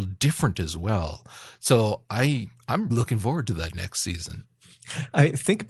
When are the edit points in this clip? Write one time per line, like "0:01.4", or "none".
0:02.9